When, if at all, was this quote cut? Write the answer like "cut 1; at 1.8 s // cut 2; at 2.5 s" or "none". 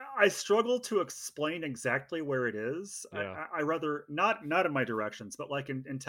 none